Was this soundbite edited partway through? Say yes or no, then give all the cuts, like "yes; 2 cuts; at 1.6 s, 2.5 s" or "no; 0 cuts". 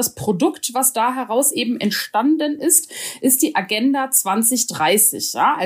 no; 0 cuts